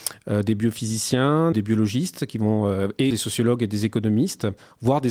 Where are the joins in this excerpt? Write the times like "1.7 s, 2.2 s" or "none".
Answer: 1.5 s, 3.1 s